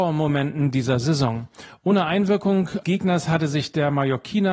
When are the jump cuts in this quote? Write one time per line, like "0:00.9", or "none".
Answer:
0:02.8

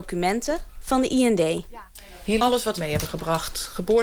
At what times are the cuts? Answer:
0:02.4
0:02.8

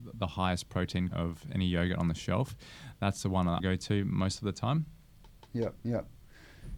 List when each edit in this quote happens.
0:01.1
0:03.6
0:05.8

